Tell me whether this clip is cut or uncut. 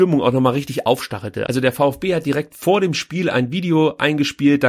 uncut